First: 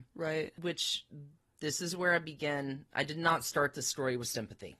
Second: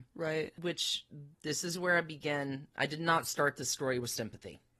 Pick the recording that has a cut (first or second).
second